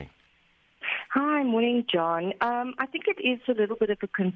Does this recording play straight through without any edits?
yes; 0 cuts

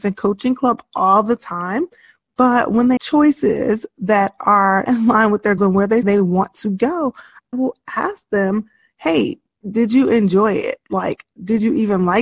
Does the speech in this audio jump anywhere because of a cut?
yes; 6 cuts; at 3.0 s, 4.9 s, 5.6 s, 6.0 s, 7.5 s, 9.6 s

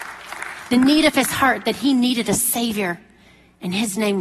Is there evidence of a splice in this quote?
no; 0 cuts

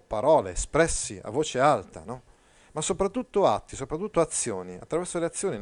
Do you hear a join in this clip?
no; 0 cuts

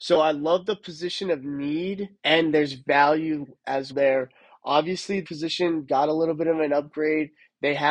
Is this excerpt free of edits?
no; 3 cuts; at 2.2 s, 3.9 s, 5.2 s

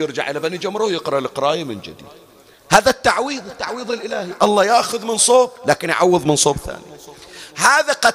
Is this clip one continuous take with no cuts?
no; 1 cut; at 5.6 s

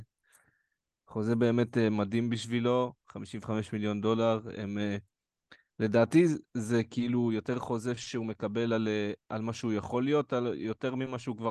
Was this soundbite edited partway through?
no; 0 cuts

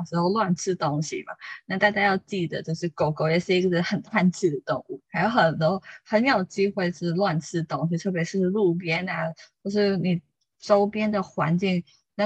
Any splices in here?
no; 0 cuts

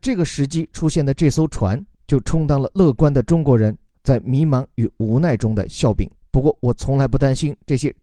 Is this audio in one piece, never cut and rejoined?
yes; 0 cuts

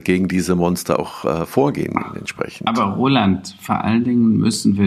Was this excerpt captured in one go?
yes; 0 cuts

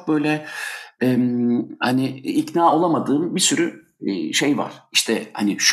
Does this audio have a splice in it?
no; 0 cuts

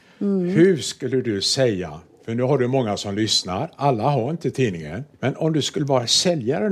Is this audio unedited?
no; 1 cut; at 5.1 s

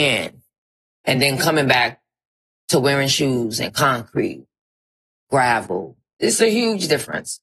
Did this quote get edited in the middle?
no; 0 cuts

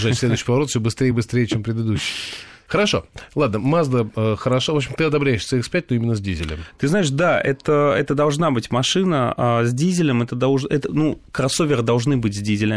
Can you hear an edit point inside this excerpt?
no; 0 cuts

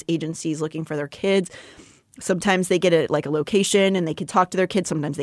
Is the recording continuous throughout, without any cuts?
yes; 0 cuts

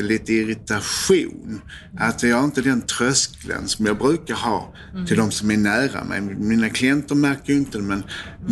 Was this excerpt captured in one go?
yes; 0 cuts

